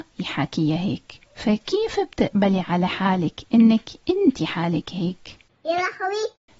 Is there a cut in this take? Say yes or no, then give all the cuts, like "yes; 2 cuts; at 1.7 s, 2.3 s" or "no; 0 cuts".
yes; 2 cuts; at 1.3 s, 4.4 s